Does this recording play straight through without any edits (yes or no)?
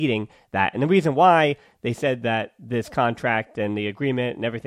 yes